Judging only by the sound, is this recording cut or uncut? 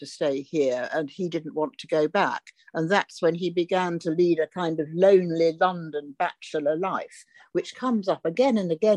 uncut